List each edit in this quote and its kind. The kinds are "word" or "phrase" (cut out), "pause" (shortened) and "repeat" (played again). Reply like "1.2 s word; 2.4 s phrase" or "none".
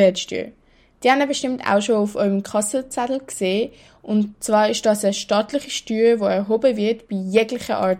none